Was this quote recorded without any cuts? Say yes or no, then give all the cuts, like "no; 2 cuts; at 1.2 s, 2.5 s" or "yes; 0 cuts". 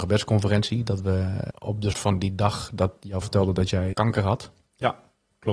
no; 4 cuts; at 1.5 s, 1.9 s, 3.2 s, 3.9 s